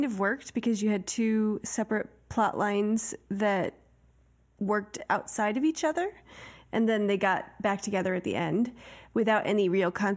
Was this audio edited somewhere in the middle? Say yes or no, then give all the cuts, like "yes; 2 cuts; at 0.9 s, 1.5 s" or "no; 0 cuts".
no; 0 cuts